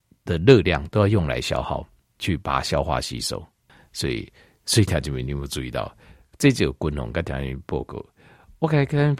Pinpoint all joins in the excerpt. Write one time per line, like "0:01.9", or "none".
none